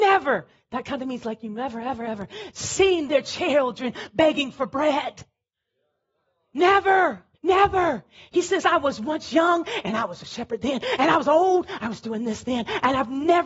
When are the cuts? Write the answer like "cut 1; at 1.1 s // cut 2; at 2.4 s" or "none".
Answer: cut 1; at 3.1 s // cut 2; at 7.3 s